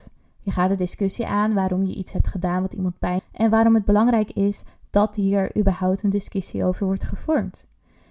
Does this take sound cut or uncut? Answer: cut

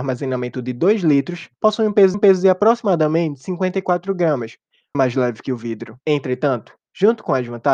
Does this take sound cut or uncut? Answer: cut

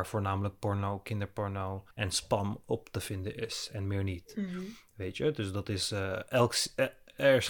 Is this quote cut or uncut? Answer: cut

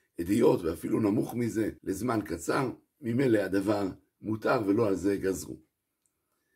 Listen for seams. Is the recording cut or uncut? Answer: cut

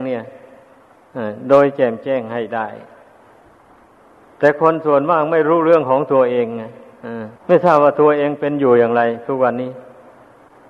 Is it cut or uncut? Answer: cut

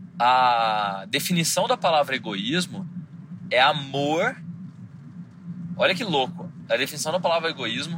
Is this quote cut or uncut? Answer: uncut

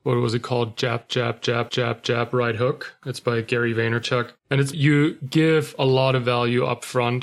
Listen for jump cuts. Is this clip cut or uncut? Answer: cut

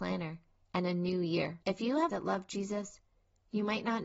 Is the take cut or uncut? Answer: cut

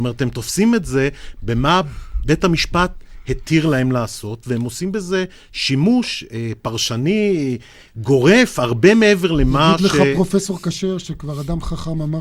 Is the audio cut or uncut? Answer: uncut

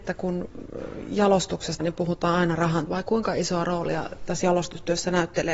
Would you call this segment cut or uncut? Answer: cut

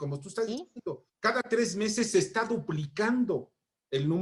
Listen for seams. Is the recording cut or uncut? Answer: cut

